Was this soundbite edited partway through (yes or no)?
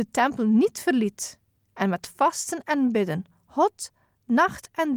no